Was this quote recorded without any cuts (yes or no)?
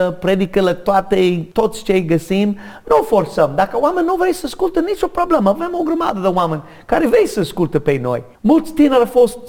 no